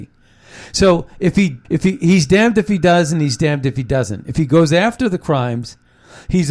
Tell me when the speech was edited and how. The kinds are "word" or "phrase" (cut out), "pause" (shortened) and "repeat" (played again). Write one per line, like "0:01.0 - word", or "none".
0:01.6 - pause